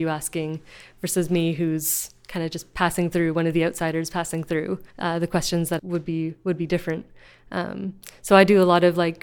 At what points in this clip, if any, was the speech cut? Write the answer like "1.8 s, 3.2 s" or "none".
4.9 s, 5.8 s